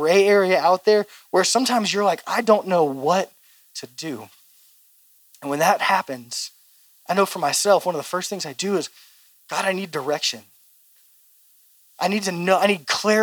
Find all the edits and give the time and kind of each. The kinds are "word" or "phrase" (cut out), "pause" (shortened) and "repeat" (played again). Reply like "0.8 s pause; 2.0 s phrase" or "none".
none